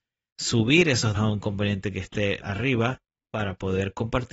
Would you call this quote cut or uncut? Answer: cut